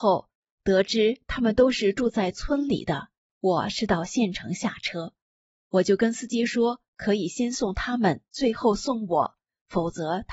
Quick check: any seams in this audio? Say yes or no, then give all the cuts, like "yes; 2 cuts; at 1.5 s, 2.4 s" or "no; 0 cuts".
no; 0 cuts